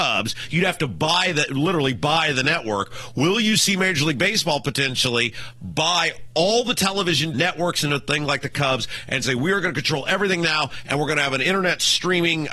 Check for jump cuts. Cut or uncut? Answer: cut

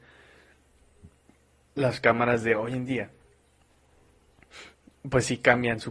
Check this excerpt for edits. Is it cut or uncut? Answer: uncut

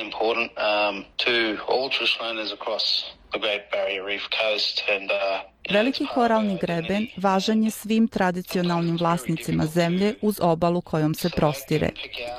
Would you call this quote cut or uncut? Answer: cut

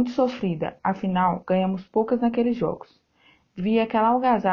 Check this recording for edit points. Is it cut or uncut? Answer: uncut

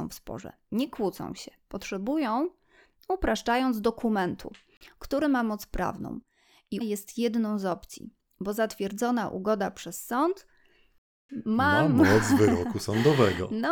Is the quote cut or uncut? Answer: cut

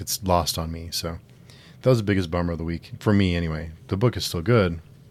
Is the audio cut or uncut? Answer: uncut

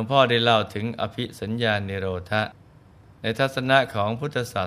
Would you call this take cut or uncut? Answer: uncut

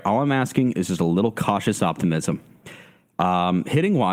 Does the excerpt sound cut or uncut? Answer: uncut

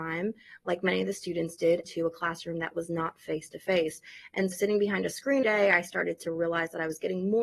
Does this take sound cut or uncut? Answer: cut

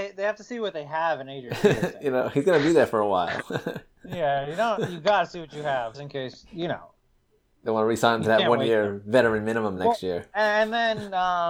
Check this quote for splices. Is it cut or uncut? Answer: cut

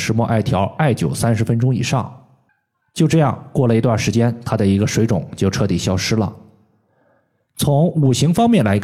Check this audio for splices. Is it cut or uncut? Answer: uncut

